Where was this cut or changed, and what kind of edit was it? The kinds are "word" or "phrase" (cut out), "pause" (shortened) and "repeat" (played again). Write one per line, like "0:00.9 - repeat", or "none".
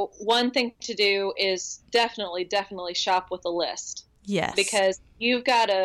0:01.9 - pause